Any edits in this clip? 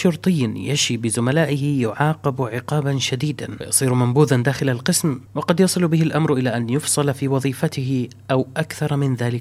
no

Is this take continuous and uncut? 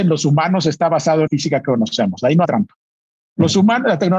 no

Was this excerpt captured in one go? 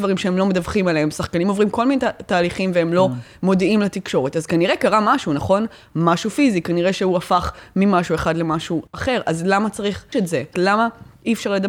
no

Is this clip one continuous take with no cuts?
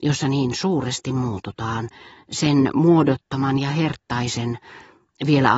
yes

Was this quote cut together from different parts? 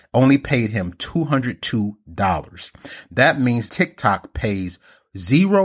yes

